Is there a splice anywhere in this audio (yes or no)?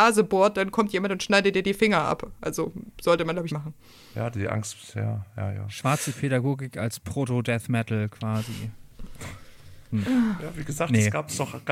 yes